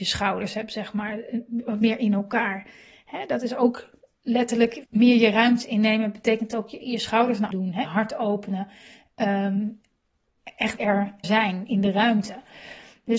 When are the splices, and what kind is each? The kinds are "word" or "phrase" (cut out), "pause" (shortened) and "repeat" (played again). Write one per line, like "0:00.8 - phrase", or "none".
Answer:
0:04.8 - word
0:06.8 - word
0:07.5 - word
0:07.8 - word
0:10.8 - word
0:11.2 - word